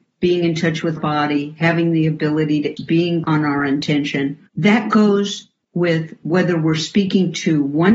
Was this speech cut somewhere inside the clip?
yes; 4 cuts; at 1.0 s, 2.8 s, 3.2 s, 4.5 s

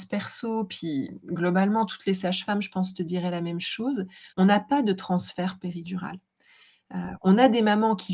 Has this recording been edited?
yes; 2 cuts; at 4.3 s, 5.6 s

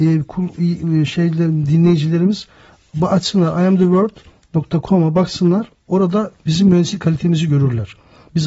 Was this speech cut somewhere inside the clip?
no; 0 cuts

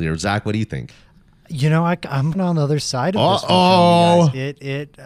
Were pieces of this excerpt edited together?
yes; 1 cut; at 2.3 s

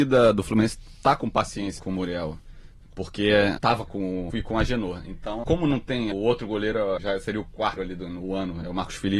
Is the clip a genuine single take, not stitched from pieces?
no; 8 cuts; at 1.8 s, 3.6 s, 3.9 s, 4.3 s, 5.4 s, 6.1 s, 7.0 s, 7.8 s

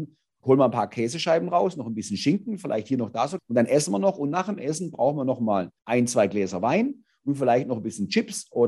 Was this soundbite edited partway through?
yes; 2 cuts; at 3.4 s, 5.8 s

